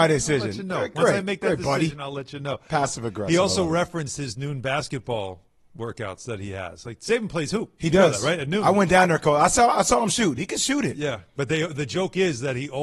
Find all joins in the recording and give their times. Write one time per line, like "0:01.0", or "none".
none